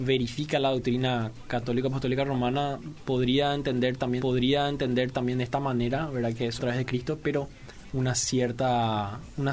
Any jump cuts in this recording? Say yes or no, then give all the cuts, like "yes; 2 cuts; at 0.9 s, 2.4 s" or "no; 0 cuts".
yes; 3 cuts; at 4.2 s, 6.6 s, 7.9 s